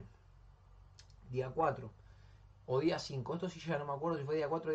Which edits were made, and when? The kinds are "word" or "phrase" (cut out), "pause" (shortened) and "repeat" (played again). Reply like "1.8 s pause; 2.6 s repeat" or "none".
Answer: none